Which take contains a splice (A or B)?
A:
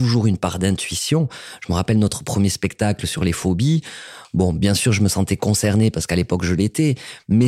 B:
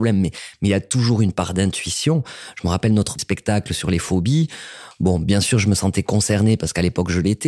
B